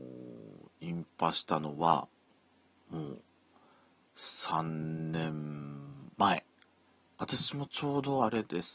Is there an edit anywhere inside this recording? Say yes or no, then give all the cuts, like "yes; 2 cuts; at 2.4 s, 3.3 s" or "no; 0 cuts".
no; 0 cuts